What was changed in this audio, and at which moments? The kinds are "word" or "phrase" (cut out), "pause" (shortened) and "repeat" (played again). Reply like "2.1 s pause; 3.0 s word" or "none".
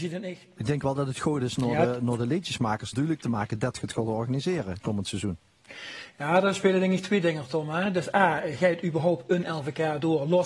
2.9 s phrase

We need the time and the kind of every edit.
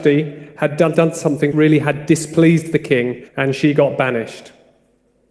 0.9 s word; 1.5 s word; 3.3 s pause

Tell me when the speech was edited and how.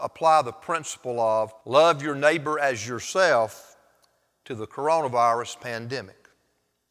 1.6 s pause

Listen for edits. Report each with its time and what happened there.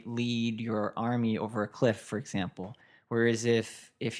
none

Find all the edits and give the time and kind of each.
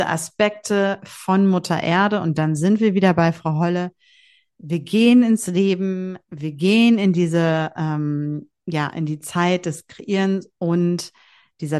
none

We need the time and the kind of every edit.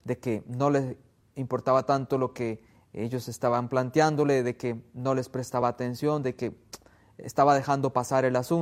none

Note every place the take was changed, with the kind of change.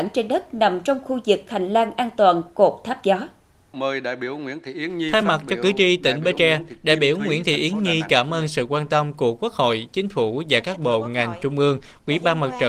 none

